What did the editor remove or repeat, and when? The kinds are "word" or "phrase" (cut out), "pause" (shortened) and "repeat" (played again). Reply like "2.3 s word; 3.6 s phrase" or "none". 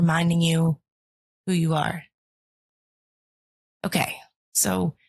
none